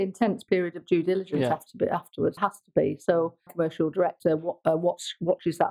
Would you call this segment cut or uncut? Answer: cut